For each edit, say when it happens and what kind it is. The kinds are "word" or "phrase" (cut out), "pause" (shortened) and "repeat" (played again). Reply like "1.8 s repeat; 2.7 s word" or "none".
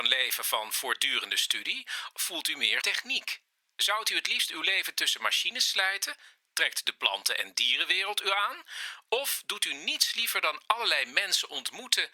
2.1 s word; 2.8 s word